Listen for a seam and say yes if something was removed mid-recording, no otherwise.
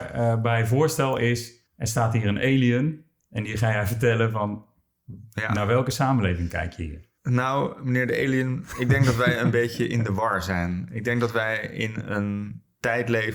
yes